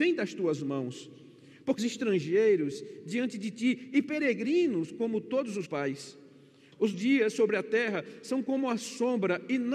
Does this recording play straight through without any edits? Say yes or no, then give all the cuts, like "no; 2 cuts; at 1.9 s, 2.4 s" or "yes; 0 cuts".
no; 3 cuts; at 1.8 s, 5.6 s, 6.9 s